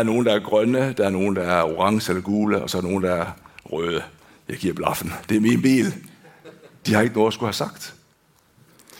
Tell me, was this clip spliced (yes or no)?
no